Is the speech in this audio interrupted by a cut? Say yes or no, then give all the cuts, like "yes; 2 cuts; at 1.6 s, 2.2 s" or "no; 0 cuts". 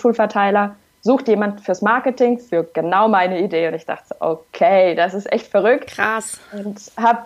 no; 0 cuts